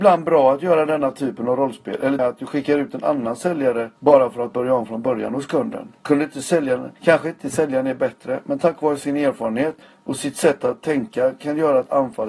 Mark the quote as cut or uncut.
cut